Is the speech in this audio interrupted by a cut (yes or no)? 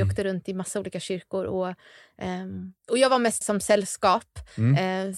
yes